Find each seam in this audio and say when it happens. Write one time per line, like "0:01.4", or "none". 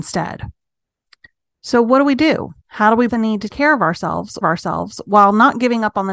0:02.6
0:03.1
0:03.5
0:04.4